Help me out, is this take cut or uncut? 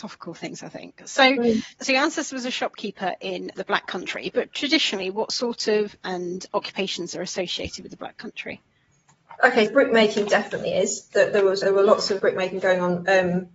cut